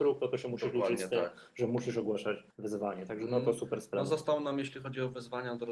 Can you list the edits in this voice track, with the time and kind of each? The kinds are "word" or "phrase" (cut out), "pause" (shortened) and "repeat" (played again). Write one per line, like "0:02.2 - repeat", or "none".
0:02.5 - pause